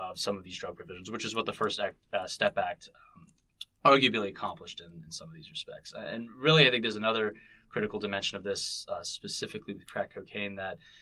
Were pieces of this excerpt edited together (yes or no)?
no